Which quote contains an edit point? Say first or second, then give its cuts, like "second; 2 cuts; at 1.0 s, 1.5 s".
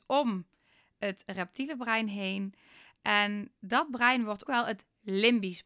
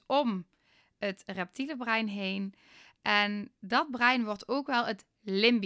first; 1 cut; at 4.4 s